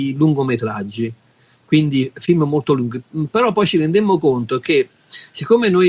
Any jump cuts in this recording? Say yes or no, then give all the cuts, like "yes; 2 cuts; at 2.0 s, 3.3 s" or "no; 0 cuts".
no; 0 cuts